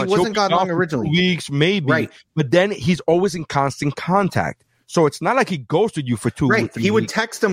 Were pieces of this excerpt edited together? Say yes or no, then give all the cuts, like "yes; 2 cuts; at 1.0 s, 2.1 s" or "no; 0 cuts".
no; 0 cuts